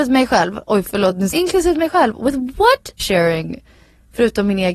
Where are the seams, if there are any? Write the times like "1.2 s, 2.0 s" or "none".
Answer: 1.3 s, 3.0 s